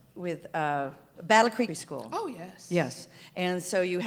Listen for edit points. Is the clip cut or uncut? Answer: cut